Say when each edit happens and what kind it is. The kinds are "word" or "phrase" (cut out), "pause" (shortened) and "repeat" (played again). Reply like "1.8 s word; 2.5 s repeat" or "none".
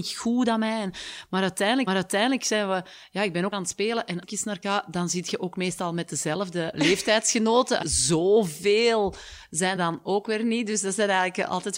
1.9 s repeat; 3.5 s phrase; 4.2 s word; 4.6 s word; 6.7 s word; 7.8 s phrase; 9.8 s word